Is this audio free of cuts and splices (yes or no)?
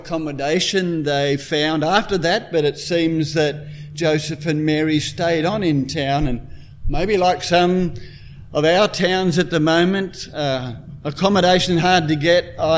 yes